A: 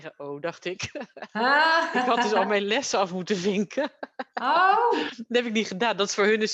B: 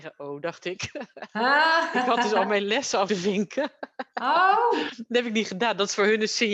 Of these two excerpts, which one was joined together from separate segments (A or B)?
B